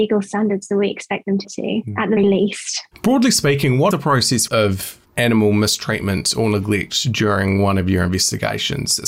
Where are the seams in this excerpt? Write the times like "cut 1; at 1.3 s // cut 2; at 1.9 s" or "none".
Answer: cut 1; at 1.4 s // cut 2; at 2.2 s // cut 3; at 3.9 s // cut 4; at 4.5 s // cut 5; at 5.0 s